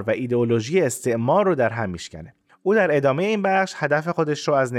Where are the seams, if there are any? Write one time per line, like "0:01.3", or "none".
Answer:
none